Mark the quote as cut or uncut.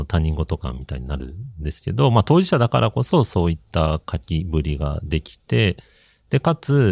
uncut